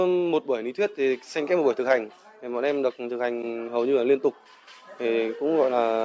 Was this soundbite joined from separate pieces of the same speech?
no; 0 cuts

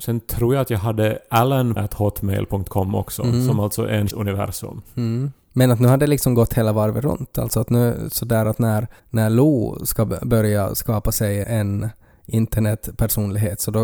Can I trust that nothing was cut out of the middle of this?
no; 5 cuts; at 1.8 s, 4.1 s, 5.4 s, 9.0 s, 11.4 s

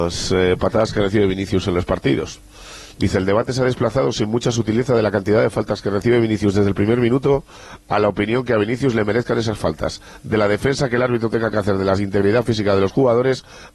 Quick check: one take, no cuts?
yes; 0 cuts

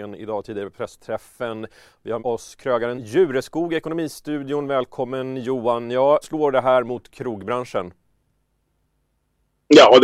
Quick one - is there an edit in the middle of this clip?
yes; 3 cuts; at 2.2 s, 3.0 s, 6.2 s

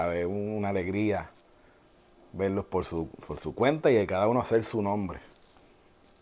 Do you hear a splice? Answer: no; 0 cuts

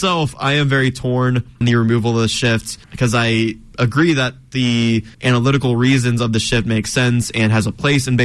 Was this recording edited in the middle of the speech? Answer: yes; 3 cuts; at 1.6 s, 2.8 s, 5.1 s

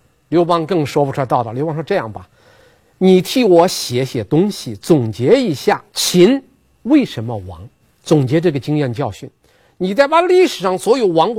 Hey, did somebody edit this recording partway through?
yes; 2 cuts; at 5.9 s, 7.8 s

